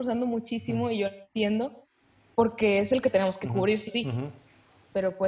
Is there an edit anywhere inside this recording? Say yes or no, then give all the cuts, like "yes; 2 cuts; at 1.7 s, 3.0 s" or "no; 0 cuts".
yes; 2 cuts; at 3.0 s, 3.9 s